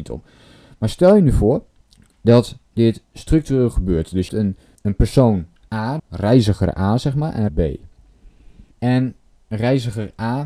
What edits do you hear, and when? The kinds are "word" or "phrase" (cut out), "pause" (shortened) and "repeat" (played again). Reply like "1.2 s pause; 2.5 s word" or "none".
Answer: 1.8 s pause; 4.3 s word; 4.8 s word; 6.0 s phrase; 7.5 s word; 8.7 s pause